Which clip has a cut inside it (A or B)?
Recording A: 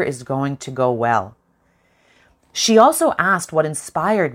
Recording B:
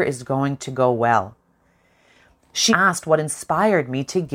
B